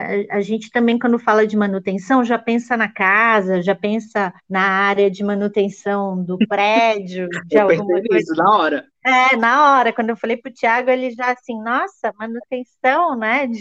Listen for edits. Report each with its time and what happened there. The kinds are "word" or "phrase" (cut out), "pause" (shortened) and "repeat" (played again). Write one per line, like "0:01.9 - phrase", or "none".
0:04.4 - pause